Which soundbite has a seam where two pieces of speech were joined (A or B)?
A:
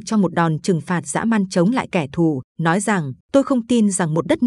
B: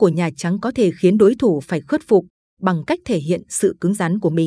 A